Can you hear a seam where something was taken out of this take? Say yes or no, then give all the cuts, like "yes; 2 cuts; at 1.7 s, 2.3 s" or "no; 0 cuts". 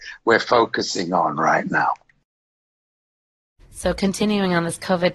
no; 0 cuts